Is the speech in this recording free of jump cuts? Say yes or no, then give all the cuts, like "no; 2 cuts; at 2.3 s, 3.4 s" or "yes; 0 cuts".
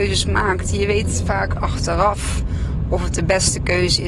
no; 1 cut; at 1.6 s